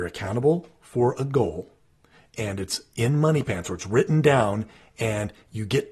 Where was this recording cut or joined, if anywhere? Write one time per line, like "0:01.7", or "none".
none